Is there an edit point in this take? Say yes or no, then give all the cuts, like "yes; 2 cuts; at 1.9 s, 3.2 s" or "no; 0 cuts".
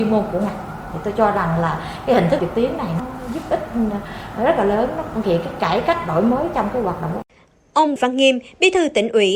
yes; 4 cuts; at 2.4 s, 3.0 s, 5.2 s, 8.0 s